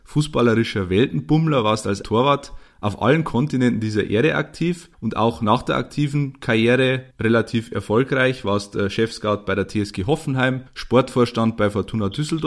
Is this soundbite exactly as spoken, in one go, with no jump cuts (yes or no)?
no